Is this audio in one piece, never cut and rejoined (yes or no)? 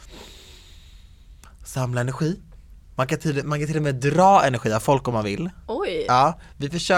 yes